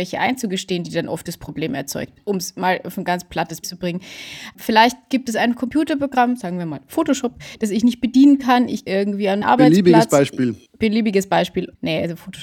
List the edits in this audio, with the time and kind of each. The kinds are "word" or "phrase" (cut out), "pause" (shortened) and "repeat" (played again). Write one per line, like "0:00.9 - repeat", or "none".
0:03.6 - word
0:08.9 - word
0:09.4 - word
0:10.7 - pause